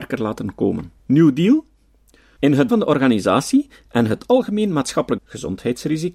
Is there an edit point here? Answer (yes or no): yes